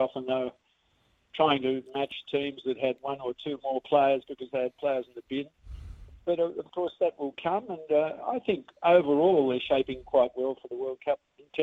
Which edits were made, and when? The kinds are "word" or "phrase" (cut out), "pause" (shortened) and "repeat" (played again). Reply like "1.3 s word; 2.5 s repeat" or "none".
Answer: 3.0 s word